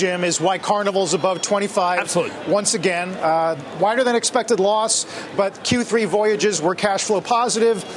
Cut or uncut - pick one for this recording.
uncut